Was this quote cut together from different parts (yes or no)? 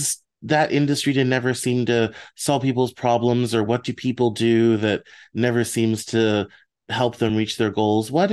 no